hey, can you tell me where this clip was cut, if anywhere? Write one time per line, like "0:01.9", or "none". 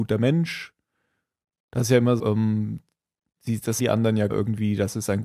0:02.2
0:03.8
0:04.3